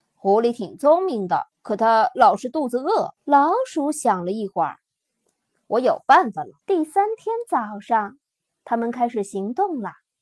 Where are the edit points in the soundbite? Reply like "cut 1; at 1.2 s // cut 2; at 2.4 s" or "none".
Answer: cut 1; at 1.5 s // cut 2; at 3.2 s // cut 3; at 6.6 s